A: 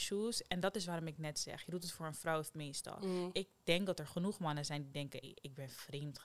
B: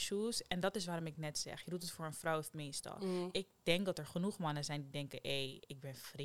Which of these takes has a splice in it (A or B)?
A